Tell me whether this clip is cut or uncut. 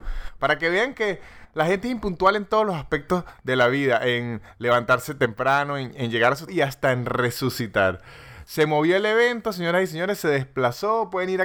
cut